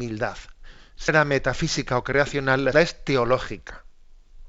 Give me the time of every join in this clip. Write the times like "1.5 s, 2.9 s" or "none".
1.1 s, 2.7 s